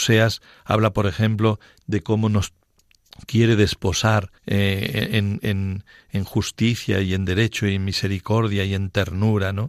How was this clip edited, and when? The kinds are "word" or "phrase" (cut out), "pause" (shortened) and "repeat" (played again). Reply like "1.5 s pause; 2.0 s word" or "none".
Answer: 4.4 s pause